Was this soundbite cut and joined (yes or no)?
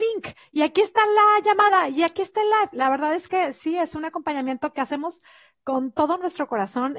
no